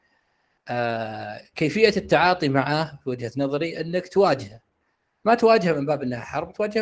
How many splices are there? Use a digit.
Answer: 0